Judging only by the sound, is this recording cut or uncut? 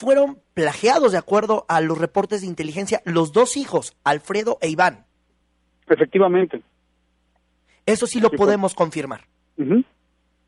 uncut